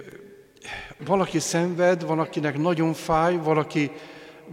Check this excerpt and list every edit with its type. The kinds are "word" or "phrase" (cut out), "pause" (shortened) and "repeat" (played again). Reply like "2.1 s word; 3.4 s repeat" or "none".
1.0 s word